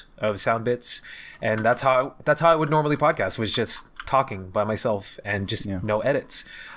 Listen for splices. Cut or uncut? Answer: uncut